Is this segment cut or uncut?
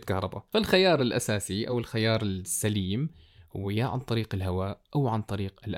uncut